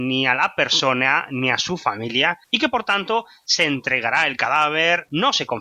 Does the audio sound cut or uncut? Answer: cut